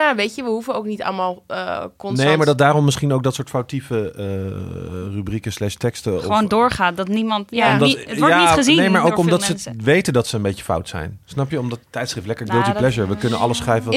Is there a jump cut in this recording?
yes; 1 cut; at 11.8 s

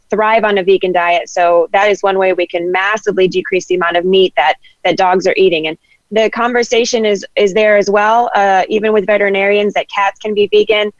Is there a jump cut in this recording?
yes; 1 cut; at 6.0 s

